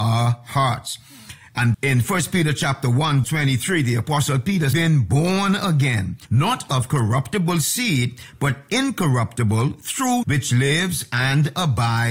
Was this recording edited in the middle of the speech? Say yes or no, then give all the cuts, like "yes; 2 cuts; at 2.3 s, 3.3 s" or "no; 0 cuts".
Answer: yes; 5 cuts; at 1.7 s, 3.2 s, 4.7 s, 6.2 s, 10.2 s